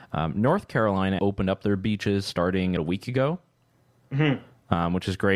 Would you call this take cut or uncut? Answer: cut